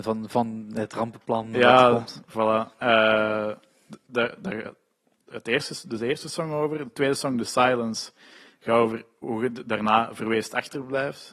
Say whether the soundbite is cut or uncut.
uncut